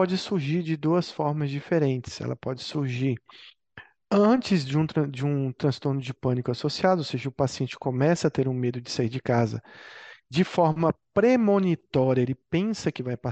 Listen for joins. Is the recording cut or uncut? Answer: uncut